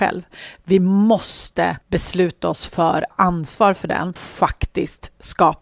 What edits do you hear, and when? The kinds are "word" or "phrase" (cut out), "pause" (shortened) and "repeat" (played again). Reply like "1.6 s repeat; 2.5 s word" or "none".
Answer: 1.8 s pause; 3.1 s phrase; 4.2 s word